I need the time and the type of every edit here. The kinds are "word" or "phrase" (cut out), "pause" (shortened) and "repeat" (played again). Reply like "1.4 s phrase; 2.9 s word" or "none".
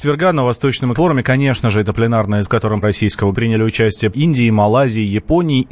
0.9 s word; 2.4 s word; 2.8 s word; 3.3 s word; 4.1 s word